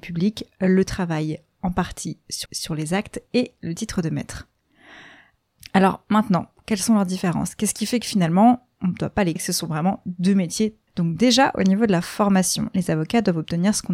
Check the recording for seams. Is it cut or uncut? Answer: cut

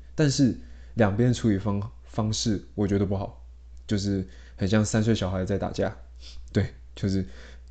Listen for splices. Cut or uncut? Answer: uncut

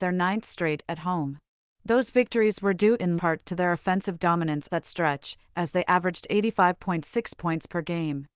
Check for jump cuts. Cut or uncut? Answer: cut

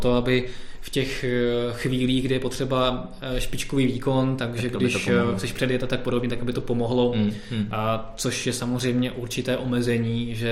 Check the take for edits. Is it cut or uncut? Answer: uncut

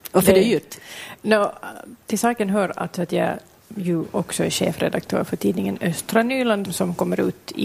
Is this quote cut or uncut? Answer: cut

